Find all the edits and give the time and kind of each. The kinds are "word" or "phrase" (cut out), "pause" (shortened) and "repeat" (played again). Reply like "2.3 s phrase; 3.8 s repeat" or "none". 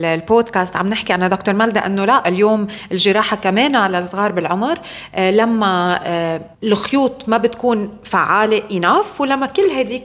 6.5 s pause